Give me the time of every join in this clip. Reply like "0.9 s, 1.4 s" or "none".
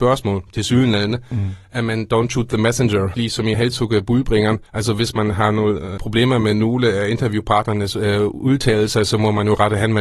3.1 s, 3.5 s, 4.7 s, 6.0 s